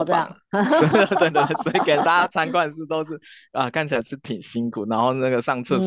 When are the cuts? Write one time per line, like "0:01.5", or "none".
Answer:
none